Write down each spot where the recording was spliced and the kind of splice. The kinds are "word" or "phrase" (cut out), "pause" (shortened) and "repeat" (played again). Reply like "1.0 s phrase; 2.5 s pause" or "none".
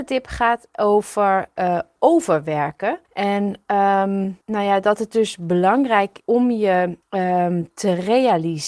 3.0 s pause; 4.4 s pause; 6.2 s word; 7.0 s pause